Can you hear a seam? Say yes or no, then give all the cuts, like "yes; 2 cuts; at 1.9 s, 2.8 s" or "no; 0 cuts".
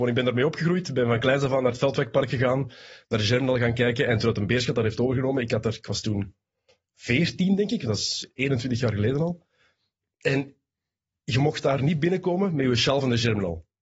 no; 0 cuts